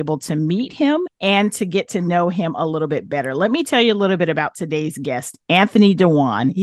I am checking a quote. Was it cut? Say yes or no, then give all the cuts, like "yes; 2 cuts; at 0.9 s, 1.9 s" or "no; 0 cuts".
no; 0 cuts